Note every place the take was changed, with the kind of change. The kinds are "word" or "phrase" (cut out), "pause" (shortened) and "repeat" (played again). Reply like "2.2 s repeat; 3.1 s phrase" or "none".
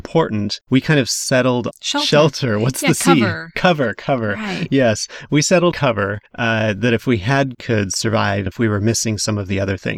1.7 s word; 5.7 s word; 6.3 s pause; 7.5 s phrase; 8.5 s word